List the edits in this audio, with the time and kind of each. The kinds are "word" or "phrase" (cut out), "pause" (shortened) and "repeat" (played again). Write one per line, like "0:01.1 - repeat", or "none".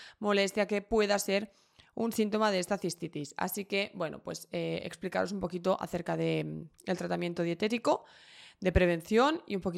none